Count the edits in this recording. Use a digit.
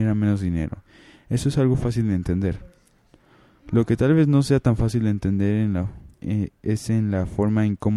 1